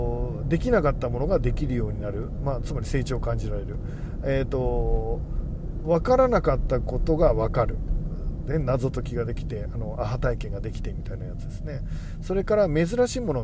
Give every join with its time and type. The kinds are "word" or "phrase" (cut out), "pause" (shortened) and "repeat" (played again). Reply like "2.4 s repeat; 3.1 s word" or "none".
none